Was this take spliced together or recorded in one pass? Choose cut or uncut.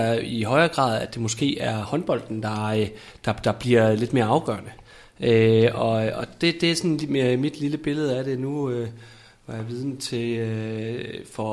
uncut